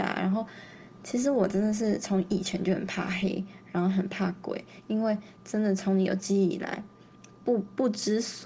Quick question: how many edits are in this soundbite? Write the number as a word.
one